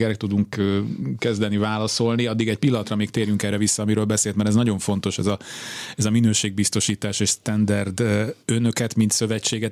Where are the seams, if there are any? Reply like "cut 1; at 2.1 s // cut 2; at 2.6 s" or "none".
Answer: cut 1; at 8.4 s